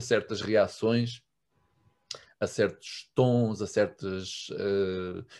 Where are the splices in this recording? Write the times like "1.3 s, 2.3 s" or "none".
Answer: none